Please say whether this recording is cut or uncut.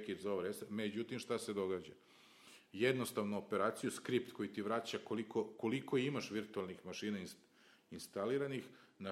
uncut